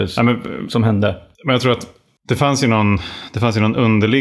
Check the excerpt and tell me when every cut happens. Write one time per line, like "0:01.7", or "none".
none